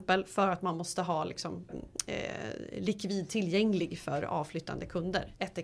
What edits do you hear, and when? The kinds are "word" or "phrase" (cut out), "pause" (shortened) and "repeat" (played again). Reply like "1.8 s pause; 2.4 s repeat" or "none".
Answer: 1.7 s word